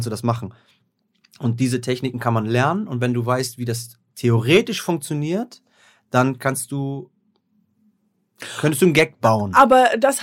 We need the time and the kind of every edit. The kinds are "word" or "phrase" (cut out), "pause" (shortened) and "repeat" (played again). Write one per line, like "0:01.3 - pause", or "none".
none